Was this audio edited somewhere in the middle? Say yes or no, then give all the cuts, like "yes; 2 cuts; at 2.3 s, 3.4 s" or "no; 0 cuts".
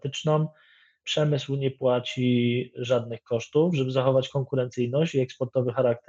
no; 0 cuts